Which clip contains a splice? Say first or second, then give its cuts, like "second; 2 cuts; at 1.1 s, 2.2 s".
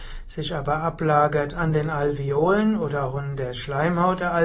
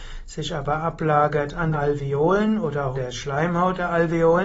second; 2 cuts; at 1.7 s, 2.9 s